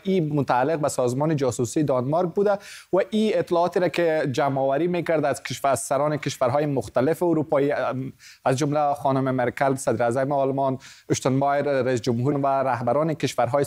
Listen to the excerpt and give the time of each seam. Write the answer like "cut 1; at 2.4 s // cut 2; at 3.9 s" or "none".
cut 1; at 12.3 s